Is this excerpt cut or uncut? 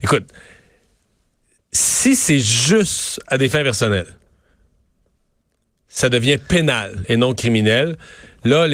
uncut